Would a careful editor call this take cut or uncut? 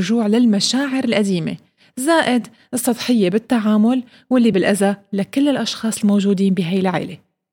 cut